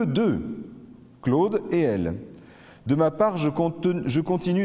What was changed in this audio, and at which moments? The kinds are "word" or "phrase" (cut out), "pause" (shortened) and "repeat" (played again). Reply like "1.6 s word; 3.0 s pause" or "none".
none